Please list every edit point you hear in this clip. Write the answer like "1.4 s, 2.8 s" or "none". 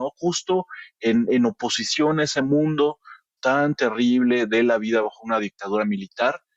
none